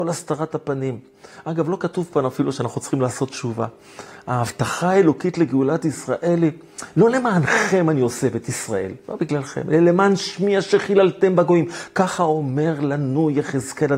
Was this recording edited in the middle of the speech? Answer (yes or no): yes